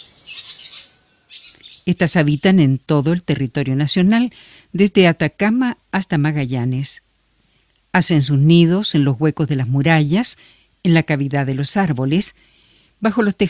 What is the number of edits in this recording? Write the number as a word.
zero